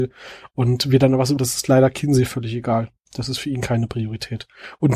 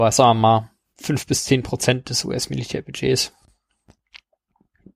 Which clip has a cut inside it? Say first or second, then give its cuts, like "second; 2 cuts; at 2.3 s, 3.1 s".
first; 1 cut; at 1.4 s